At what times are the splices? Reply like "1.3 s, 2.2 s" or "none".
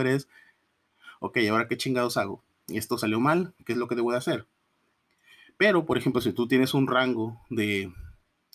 none